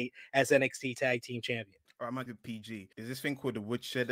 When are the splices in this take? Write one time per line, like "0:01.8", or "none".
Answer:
0:01.9
0:02.3
0:02.9